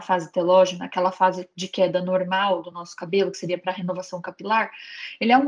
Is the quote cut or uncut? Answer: uncut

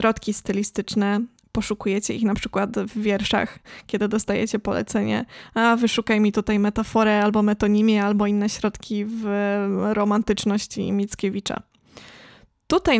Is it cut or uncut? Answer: uncut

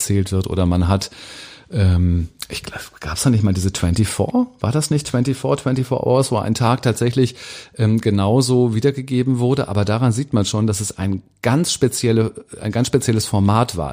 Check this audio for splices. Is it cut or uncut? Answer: uncut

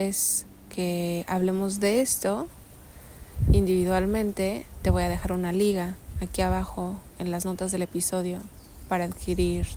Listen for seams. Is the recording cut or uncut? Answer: uncut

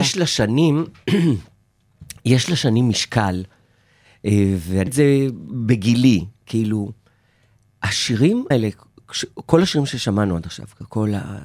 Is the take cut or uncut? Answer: cut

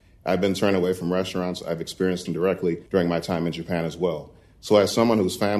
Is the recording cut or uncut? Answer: cut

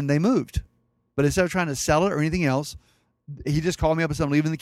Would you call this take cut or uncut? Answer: uncut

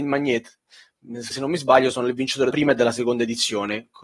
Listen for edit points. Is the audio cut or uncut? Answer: cut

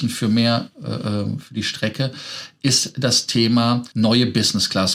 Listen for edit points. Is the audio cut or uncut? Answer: cut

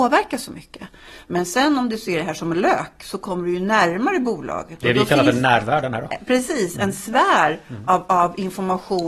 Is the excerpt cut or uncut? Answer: uncut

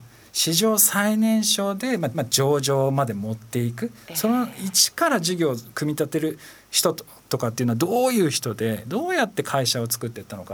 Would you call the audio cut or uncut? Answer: cut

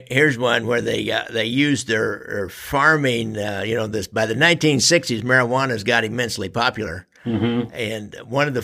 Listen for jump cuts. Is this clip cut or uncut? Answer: uncut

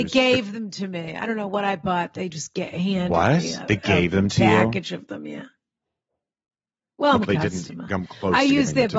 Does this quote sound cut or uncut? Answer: cut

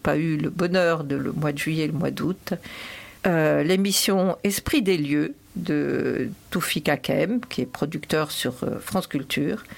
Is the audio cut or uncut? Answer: cut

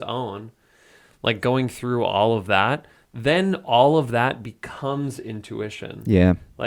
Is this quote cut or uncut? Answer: uncut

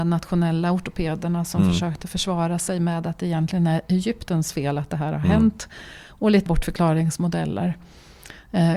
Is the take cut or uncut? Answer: cut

